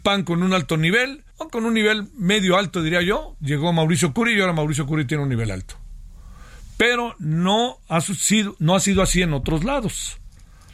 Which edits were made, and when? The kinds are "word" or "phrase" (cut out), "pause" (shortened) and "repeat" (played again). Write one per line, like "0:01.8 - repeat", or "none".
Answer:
0:01.3 - pause